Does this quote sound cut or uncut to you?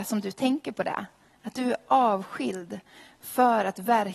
uncut